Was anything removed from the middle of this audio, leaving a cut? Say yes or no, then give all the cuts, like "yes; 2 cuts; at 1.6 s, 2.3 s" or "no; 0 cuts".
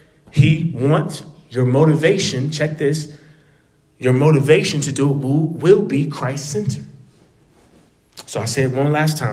no; 0 cuts